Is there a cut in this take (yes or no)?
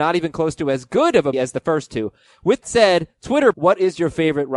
yes